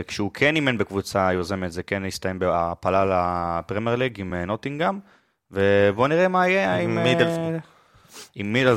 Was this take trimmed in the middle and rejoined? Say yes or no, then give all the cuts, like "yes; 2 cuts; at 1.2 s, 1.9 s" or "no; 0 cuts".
no; 0 cuts